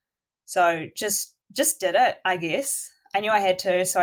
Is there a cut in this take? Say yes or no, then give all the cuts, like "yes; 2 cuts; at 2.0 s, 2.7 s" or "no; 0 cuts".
yes; 1 cut; at 1.4 s